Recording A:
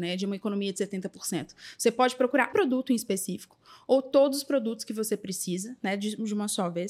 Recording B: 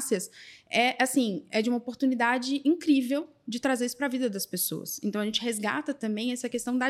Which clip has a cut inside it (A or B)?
A